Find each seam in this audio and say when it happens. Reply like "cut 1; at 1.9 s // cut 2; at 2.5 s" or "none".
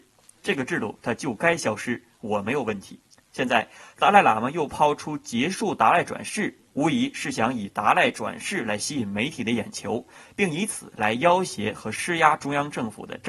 cut 1; at 3.1 s // cut 2; at 6.7 s